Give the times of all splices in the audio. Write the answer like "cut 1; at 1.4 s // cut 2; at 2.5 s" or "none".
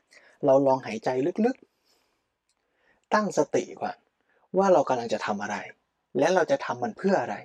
none